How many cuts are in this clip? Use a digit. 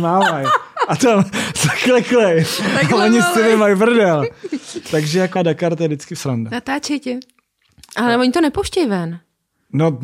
2